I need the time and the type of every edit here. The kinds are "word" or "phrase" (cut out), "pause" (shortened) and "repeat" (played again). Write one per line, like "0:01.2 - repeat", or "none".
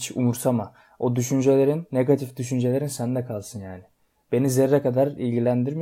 none